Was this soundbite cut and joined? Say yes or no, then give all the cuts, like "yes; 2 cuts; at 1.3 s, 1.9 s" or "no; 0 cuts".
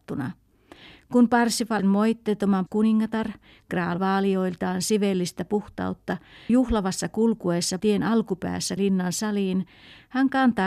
yes; 6 cuts; at 1.8 s, 2.7 s, 4.0 s, 6.5 s, 7.8 s, 8.8 s